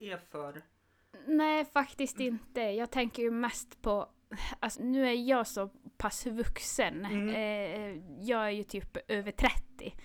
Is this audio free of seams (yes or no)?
no